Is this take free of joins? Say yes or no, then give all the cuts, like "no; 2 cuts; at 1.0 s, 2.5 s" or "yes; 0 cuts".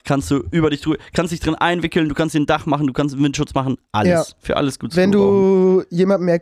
yes; 0 cuts